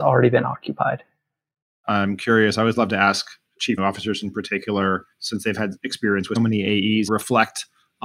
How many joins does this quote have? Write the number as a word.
four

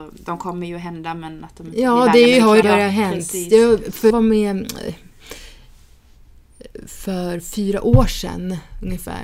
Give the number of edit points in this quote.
two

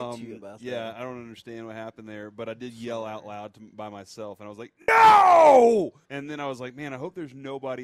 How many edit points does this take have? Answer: one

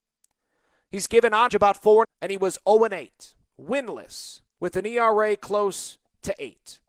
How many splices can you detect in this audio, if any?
two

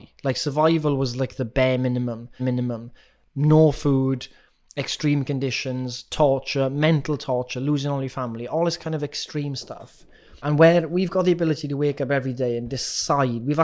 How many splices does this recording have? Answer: two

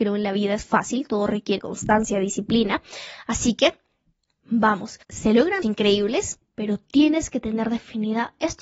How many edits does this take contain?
three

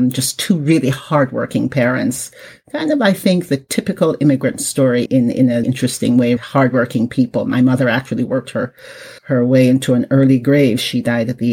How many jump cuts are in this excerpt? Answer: four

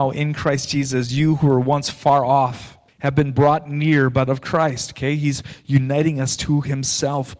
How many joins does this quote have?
two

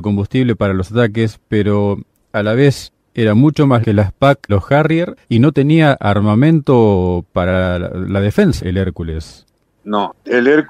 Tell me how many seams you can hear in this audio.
four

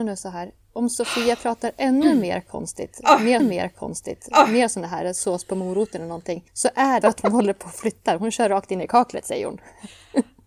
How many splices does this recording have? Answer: three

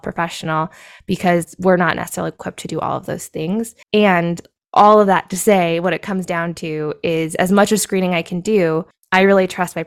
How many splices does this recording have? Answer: two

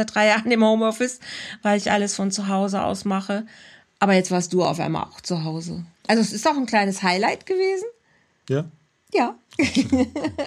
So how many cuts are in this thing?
one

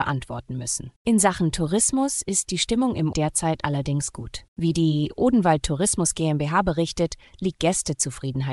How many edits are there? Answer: four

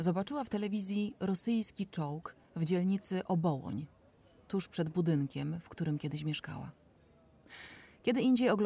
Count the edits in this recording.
zero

